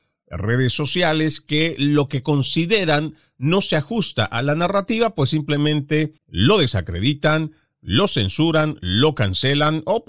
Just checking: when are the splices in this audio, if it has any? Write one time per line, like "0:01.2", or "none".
0:06.2